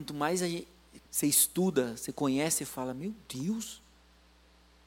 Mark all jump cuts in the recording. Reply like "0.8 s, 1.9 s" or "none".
1.1 s